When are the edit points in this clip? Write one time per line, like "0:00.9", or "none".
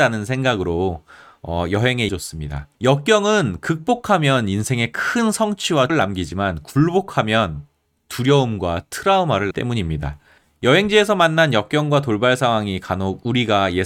0:02.1
0:02.7
0:05.9
0:09.5